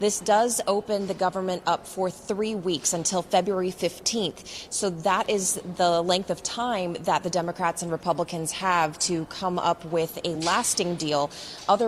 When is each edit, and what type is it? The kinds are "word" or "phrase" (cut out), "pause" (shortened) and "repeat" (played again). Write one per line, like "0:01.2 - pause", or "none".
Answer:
none